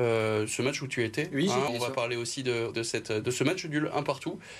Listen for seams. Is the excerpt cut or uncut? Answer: cut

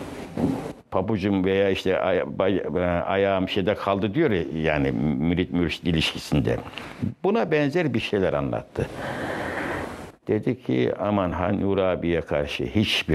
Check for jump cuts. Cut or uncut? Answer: uncut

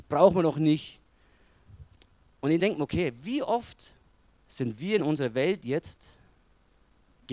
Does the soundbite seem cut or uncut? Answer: uncut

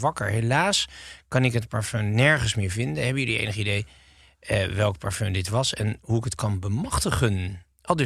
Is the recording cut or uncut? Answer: uncut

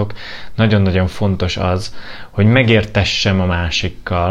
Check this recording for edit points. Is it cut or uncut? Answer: uncut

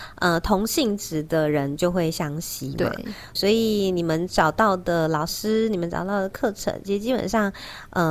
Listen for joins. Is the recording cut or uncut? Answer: cut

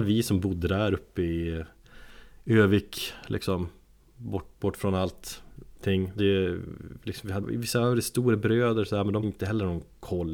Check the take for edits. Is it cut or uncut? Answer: cut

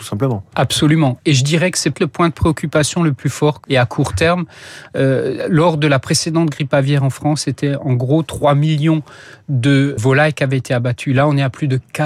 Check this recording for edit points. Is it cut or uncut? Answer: cut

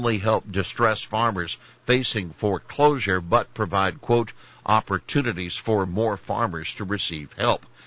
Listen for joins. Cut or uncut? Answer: uncut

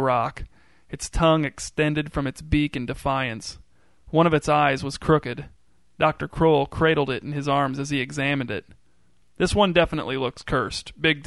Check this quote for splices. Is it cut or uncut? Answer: uncut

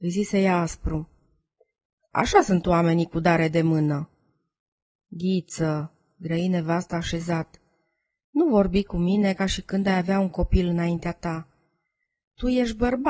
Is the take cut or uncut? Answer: uncut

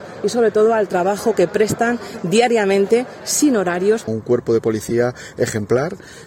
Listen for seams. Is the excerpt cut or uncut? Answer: uncut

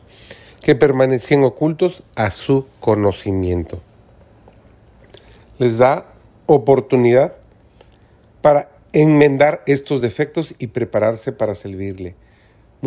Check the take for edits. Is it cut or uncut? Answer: uncut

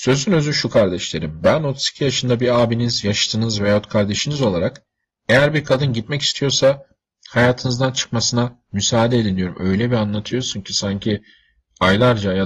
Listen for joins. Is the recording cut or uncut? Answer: uncut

